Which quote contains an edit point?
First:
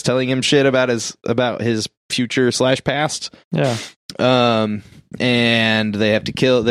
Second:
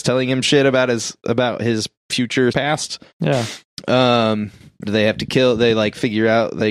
second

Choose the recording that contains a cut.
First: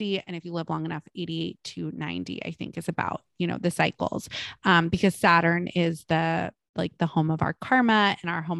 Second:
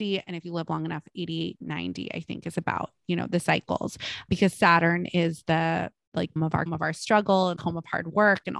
second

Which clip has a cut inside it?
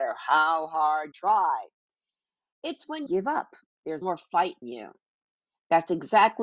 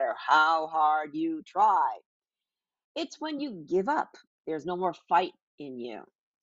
first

